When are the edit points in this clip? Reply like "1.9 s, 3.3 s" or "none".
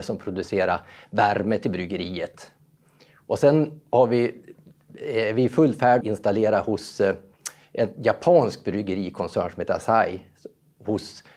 6.0 s

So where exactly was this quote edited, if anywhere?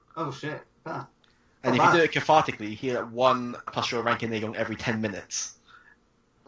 3.7 s

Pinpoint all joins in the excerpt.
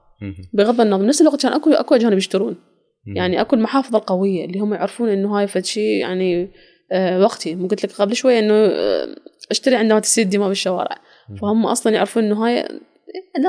none

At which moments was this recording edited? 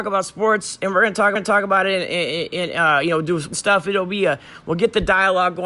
1.3 s, 3.5 s

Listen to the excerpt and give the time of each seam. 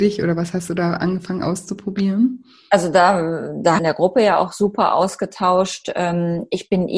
3.8 s

